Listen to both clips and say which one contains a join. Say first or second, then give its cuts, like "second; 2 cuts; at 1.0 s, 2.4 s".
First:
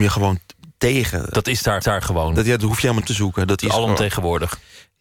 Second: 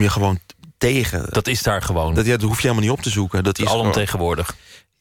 first; 2 cuts; at 1.8 s, 3.0 s